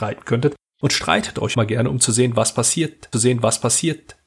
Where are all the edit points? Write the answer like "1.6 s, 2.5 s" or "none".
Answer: 1.5 s, 3.1 s